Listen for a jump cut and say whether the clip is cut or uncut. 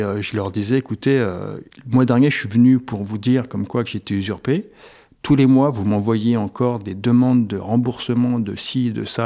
uncut